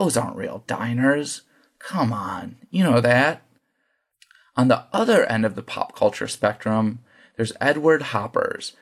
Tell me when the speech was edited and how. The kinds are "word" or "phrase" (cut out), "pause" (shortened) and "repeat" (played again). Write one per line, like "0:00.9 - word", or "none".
none